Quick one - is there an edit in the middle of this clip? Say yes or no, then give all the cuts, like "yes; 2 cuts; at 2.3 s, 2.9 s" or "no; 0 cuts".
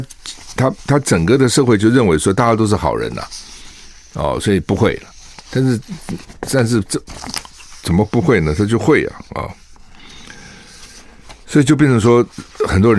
no; 0 cuts